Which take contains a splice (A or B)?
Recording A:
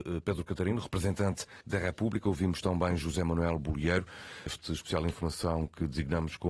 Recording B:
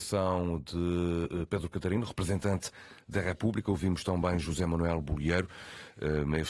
A